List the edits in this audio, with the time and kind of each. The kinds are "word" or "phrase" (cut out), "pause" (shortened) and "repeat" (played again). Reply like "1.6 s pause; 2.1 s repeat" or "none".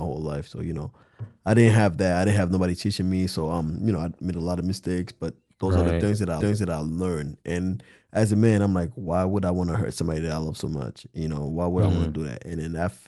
6.4 s repeat